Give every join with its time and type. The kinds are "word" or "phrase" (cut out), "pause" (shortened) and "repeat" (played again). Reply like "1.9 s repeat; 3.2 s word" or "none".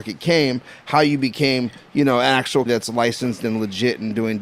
2.7 s word